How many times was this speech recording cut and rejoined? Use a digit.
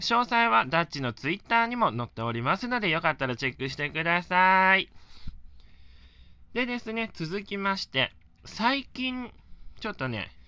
1